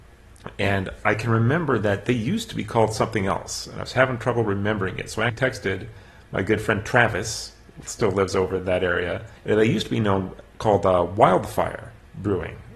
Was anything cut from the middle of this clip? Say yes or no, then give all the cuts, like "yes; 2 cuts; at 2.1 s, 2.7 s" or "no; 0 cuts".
yes; 2 cuts; at 5.3 s, 9.4 s